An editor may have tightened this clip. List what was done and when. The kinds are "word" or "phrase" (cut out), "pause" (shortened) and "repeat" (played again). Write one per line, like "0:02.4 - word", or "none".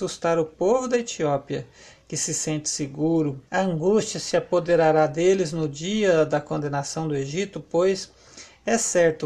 0:03.5 - pause